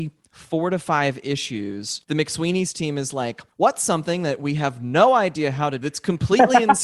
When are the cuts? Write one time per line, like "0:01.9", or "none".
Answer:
0:02.0
0:03.5
0:05.8

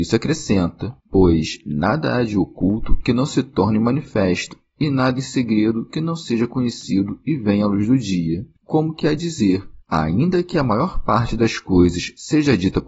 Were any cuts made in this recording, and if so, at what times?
0:01.0
0:08.6
0:09.8

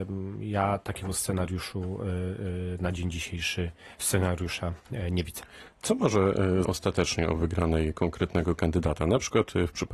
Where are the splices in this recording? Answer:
0:06.6

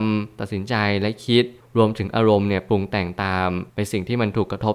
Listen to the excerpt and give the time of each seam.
0:03.7

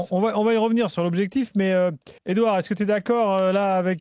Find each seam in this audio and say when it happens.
0:02.2

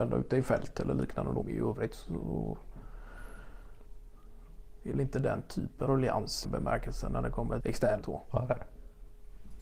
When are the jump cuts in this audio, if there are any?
0:01.4
0:04.9
0:05.9
0:06.4
0:07.6
0:08.0

